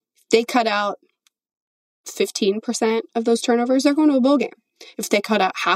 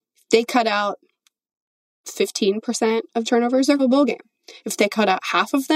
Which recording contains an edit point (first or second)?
second